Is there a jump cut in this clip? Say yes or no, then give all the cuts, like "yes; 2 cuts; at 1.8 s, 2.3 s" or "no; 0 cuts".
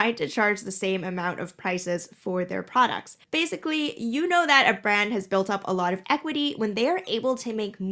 yes; 1 cut; at 3.2 s